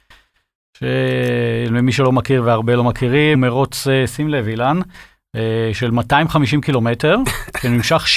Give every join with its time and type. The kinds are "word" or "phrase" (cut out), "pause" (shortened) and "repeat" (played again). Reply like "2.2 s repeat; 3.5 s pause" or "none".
3.3 s word